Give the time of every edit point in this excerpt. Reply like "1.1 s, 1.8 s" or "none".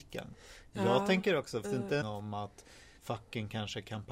1.6 s, 2.0 s, 3.0 s